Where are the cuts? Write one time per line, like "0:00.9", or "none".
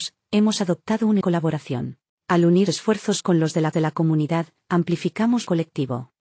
0:01.2
0:02.1
0:02.7
0:03.7
0:05.4